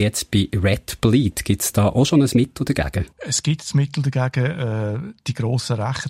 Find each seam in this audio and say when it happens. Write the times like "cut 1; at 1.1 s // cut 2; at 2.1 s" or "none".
cut 1; at 3.1 s